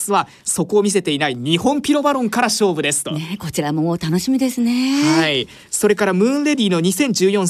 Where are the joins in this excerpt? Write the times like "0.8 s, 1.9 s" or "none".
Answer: none